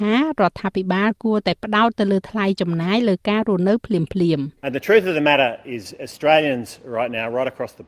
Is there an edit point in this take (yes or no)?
yes